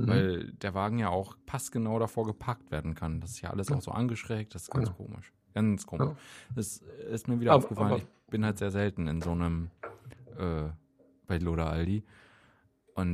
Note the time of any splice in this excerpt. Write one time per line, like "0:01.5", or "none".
0:01.4
0:11.4